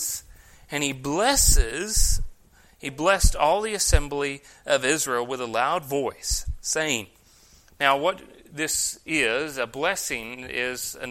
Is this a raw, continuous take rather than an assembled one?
yes; 0 cuts

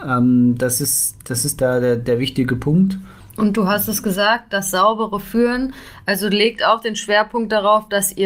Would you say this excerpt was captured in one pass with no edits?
yes; 0 cuts

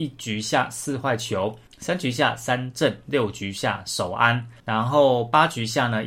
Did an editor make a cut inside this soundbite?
yes; 2 cuts; at 1.7 s, 4.6 s

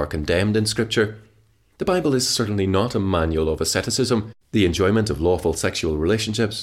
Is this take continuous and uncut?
yes; 0 cuts

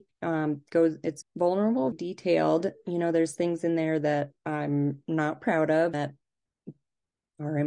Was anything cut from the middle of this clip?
yes; 4 cuts; at 1.2 s, 1.9 s, 4.4 s, 5.9 s

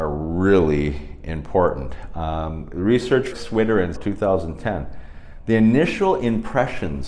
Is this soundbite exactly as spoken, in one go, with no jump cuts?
no; 2 cuts; at 3.3 s, 3.9 s

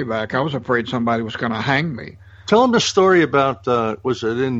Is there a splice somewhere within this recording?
no; 0 cuts

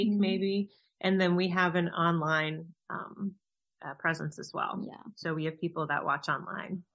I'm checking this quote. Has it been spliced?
no; 0 cuts

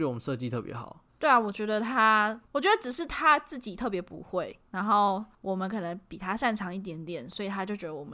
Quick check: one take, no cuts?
no; 3 cuts; at 1.1 s, 2.4 s, 5.3 s

